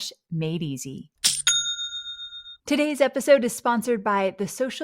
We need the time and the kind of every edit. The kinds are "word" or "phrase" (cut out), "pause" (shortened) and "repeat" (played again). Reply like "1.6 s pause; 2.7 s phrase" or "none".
2.6 s pause